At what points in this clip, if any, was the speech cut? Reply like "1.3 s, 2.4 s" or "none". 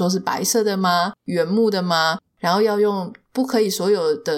1.2 s